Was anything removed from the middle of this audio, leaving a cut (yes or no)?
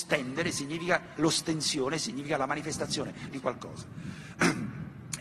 yes